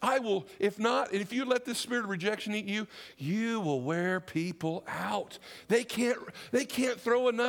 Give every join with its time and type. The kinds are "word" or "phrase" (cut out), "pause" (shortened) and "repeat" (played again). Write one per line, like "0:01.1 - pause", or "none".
none